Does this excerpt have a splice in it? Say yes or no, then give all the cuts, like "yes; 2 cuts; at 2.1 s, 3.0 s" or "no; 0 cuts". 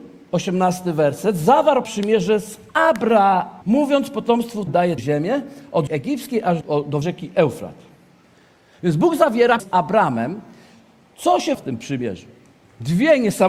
yes; 9 cuts; at 1.8 s, 3.6 s, 4.7 s, 5.0 s, 5.9 s, 6.6 s, 7.0 s, 9.6 s, 11.5 s